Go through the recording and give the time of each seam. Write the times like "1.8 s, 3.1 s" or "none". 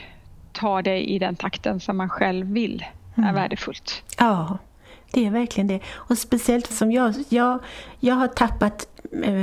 6.7 s

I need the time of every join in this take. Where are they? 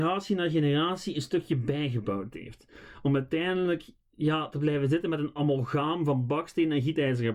none

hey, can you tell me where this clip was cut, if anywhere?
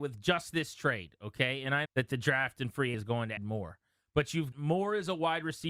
1.9 s, 2.9 s, 3.4 s, 4.5 s

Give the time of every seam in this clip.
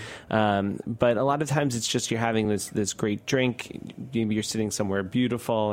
none

